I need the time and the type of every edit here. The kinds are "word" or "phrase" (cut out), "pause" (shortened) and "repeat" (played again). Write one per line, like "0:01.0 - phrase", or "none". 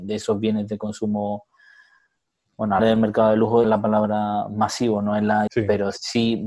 0:02.8 - word
0:03.6 - word
0:05.5 - word